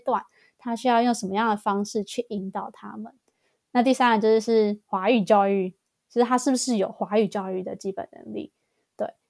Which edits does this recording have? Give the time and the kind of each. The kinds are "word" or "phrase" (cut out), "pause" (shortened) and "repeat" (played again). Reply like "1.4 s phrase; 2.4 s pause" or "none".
none